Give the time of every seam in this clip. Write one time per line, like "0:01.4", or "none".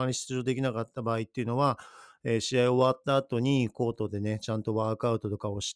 none